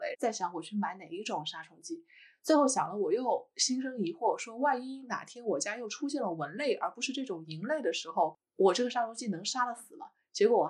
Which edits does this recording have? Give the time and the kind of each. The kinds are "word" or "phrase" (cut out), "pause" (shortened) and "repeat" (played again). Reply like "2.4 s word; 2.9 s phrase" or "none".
none

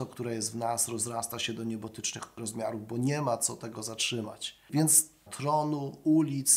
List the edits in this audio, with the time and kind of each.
5.3 s phrase

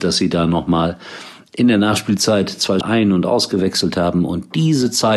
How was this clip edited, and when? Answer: 2.8 s word

